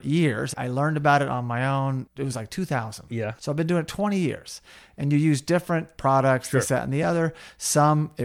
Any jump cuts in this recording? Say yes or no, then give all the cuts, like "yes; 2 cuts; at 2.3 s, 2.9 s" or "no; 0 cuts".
no; 0 cuts